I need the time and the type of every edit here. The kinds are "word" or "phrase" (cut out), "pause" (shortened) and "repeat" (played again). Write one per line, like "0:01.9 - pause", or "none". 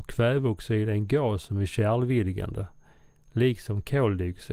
none